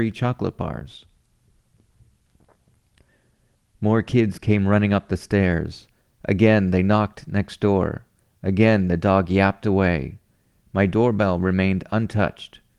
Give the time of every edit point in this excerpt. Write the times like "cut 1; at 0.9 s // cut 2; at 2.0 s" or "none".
none